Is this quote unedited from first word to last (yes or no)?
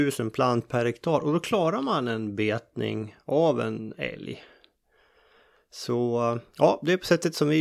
yes